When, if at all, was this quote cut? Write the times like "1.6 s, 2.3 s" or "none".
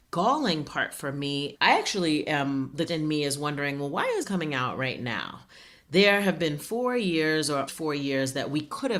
1.5 s, 2.9 s, 4.2 s, 7.7 s